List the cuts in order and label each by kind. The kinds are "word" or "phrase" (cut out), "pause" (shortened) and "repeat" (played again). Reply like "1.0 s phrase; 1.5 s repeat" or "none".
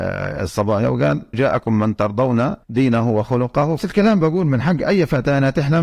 1.3 s word; 2.6 s pause; 3.8 s phrase